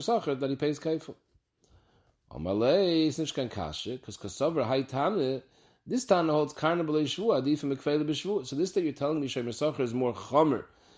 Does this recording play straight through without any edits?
yes; 0 cuts

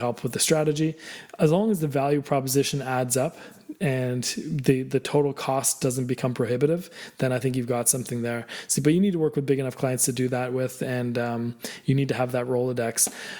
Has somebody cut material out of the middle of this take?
no; 0 cuts

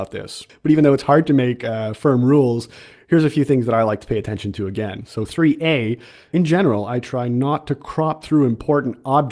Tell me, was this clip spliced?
no; 0 cuts

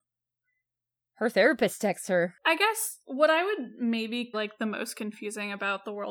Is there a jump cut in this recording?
yes; 1 cut; at 4.3 s

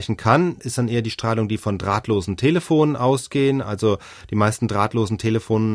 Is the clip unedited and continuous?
yes; 0 cuts

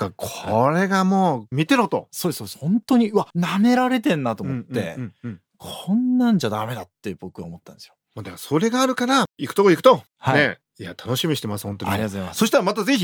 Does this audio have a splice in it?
yes; 1 cut; at 3.3 s

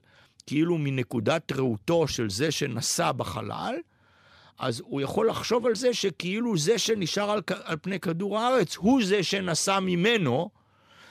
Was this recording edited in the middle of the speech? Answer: no; 0 cuts

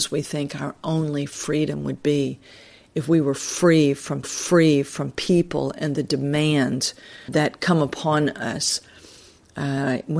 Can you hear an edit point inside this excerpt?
yes; 2 cuts; at 4.2 s, 7.3 s

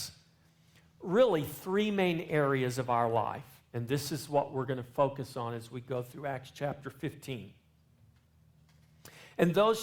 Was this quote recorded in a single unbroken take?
yes; 0 cuts

